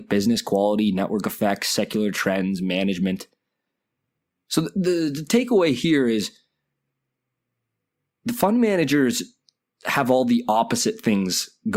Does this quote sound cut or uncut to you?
uncut